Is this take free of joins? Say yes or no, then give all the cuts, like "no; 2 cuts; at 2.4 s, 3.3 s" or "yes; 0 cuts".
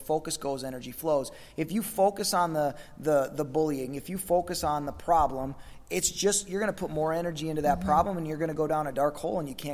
yes; 0 cuts